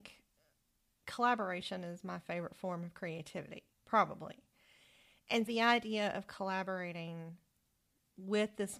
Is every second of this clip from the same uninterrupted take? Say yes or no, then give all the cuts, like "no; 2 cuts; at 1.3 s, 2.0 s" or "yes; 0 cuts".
no; 2 cuts; at 3.7 s, 5.5 s